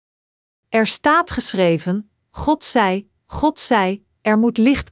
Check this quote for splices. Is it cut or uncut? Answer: cut